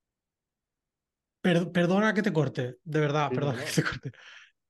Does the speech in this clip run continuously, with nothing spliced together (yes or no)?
yes